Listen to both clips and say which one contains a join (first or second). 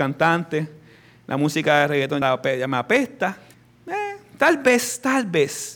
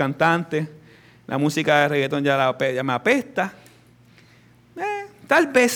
first